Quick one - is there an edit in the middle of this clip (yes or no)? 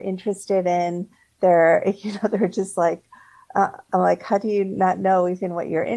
no